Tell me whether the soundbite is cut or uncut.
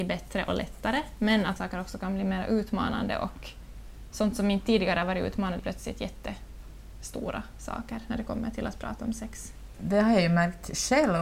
cut